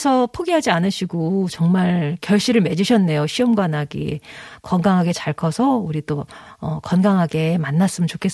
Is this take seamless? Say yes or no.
yes